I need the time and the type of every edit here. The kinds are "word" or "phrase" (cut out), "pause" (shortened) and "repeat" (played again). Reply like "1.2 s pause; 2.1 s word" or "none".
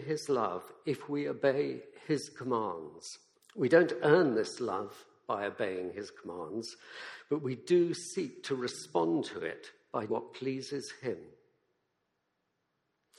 3.3 s pause; 10.1 s word